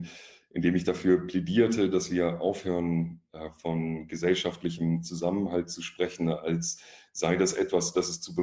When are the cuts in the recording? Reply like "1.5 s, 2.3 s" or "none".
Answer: none